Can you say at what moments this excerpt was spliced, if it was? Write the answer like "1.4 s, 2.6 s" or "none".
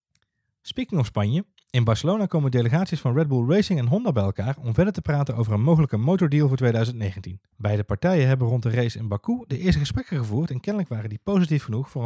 7.5 s